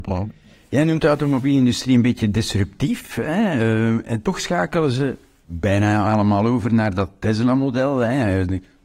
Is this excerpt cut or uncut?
uncut